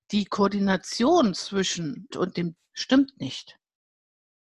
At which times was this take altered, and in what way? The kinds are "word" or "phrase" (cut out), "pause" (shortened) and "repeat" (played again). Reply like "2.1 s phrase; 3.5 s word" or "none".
2.1 s word; 2.6 s word